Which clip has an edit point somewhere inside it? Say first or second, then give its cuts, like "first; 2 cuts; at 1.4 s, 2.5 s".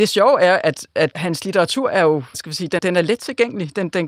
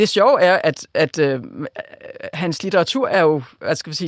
first; 3 cuts; at 1.1 s, 2.3 s, 2.8 s